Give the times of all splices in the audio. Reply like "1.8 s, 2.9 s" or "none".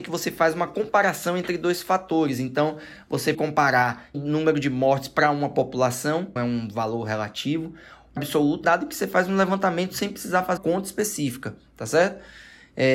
3.3 s, 4.1 s, 6.4 s, 8.2 s, 8.6 s, 10.6 s